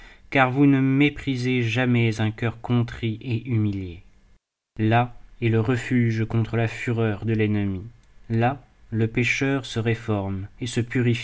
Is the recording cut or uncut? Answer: uncut